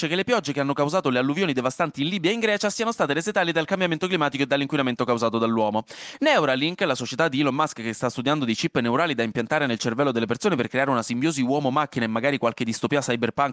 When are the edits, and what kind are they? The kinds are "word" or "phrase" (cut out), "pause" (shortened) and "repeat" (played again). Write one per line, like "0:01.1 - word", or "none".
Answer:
none